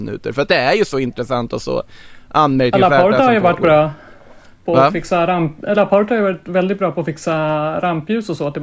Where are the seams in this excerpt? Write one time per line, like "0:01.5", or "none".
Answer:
none